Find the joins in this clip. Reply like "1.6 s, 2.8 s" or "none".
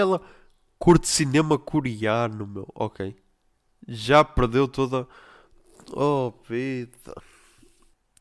none

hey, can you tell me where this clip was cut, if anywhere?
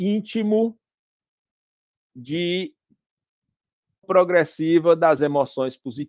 4.0 s, 5.2 s

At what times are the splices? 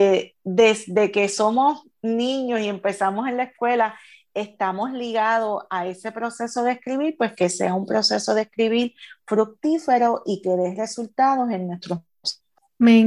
none

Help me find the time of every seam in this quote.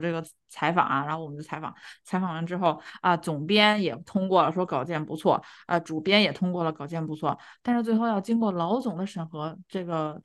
none

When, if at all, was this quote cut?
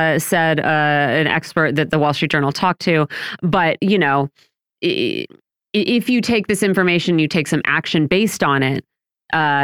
none

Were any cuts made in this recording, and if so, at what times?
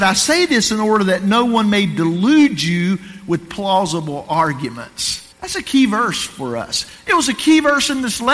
5.3 s

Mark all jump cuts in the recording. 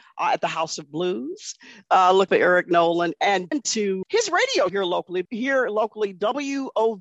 2.3 s, 3.5 s, 4.0 s, 4.7 s, 5.2 s

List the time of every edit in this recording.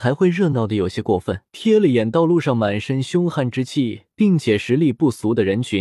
1.5 s

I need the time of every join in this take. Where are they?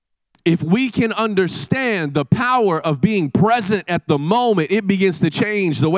none

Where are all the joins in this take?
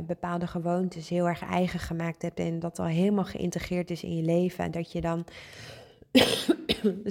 none

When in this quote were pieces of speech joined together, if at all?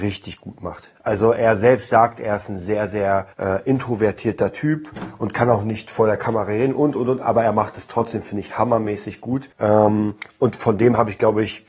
3.3 s, 9.5 s

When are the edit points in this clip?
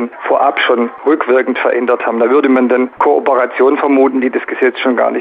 none

